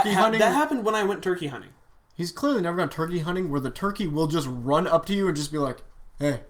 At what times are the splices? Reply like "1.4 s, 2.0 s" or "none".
none